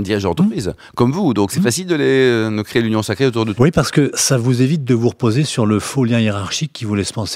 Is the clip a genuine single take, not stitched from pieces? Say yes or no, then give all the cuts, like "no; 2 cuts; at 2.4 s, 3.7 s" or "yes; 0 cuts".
no; 2 cuts; at 3.6 s, 4.1 s